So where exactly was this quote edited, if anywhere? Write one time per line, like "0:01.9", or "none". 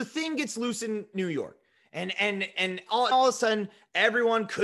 0:03.1